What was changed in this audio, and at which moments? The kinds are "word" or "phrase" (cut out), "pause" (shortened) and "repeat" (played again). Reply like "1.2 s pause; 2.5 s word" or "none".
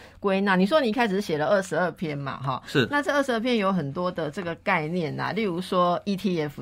none